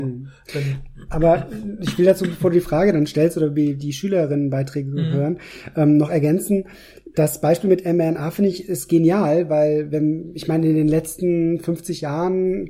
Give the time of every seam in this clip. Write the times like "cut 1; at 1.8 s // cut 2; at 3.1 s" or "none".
none

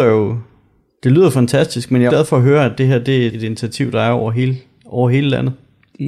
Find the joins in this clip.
cut 1; at 2.1 s // cut 2; at 3.3 s

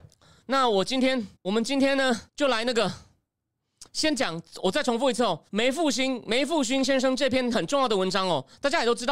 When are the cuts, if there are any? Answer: cut 1; at 1.4 s // cut 2; at 2.3 s // cut 3; at 3.9 s // cut 4; at 5.5 s

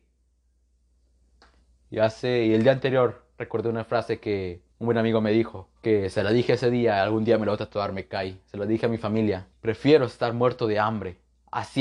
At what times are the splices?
cut 1; at 4.7 s // cut 2; at 5.8 s // cut 3; at 9.5 s

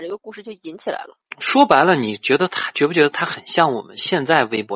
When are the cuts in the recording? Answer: none

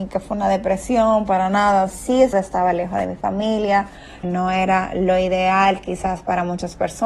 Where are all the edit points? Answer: cut 1; at 1.9 s // cut 2; at 2.3 s // cut 3; at 4.2 s

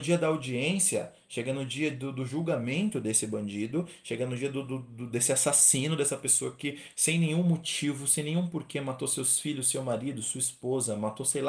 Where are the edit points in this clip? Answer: none

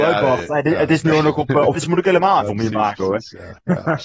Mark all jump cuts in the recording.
cut 1; at 1.7 s // cut 2; at 2.4 s

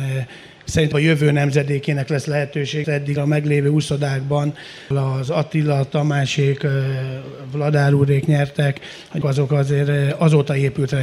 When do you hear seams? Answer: cut 1; at 0.9 s // cut 2; at 2.8 s // cut 3; at 3.2 s // cut 4; at 4.9 s // cut 5; at 9.2 s

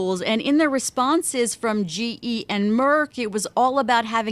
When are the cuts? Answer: none

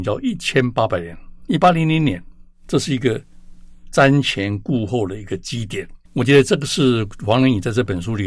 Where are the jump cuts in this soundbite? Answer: cut 1; at 6.1 s

